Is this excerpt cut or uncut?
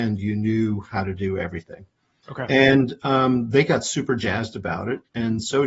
uncut